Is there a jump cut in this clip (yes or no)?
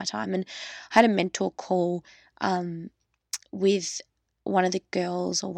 no